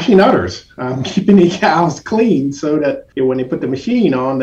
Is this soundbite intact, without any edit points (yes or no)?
no